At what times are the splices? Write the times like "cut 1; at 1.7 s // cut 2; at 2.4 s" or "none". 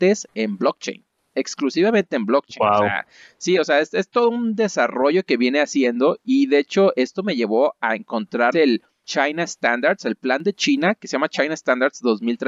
cut 1; at 8.5 s